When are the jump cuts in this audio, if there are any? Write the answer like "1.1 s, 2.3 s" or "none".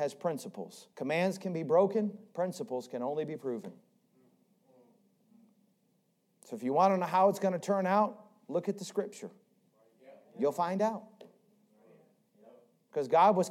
0.9 s